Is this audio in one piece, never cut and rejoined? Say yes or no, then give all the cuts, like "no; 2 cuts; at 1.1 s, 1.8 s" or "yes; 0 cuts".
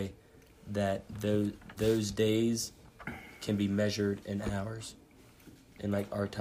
no; 1 cut; at 1.8 s